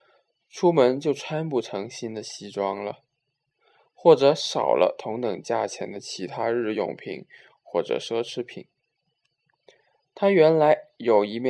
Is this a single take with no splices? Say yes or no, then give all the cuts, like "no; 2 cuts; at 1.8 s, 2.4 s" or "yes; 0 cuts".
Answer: yes; 0 cuts